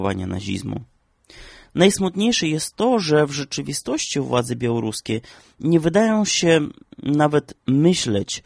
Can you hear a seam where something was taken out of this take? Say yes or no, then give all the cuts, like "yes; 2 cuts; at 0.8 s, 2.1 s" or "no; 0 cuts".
no; 0 cuts